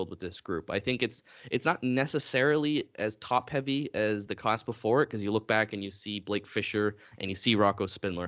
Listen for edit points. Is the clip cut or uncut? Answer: uncut